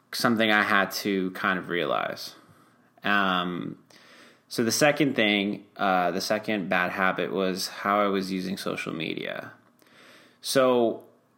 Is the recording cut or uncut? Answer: uncut